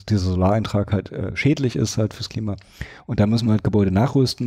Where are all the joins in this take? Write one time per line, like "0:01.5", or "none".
none